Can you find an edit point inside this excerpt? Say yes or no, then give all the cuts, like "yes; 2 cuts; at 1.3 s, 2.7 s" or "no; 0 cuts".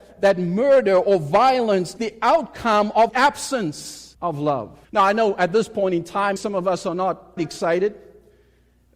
yes; 6 cuts; at 2.0 s, 3.1 s, 4.1 s, 4.8 s, 6.4 s, 7.4 s